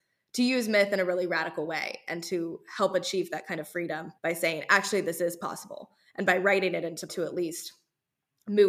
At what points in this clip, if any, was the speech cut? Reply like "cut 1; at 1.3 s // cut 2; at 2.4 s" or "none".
cut 1; at 4.2 s // cut 2; at 7.1 s